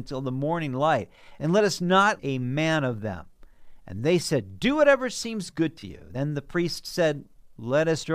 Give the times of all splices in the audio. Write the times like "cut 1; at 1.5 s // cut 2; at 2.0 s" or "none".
cut 1; at 2.2 s